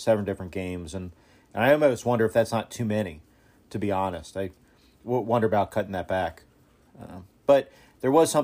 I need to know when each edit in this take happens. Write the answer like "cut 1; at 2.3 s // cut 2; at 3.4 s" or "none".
none